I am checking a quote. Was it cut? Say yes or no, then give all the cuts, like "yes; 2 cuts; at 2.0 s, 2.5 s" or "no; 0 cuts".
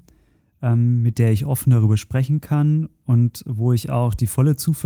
no; 0 cuts